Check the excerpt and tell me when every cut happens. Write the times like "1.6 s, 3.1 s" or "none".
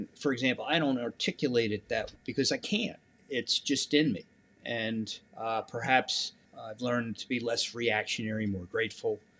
2.1 s, 3.1 s, 5.3 s